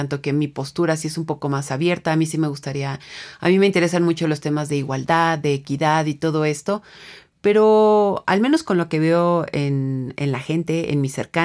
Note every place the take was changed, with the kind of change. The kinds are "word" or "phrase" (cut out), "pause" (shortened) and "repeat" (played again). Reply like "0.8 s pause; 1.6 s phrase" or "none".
none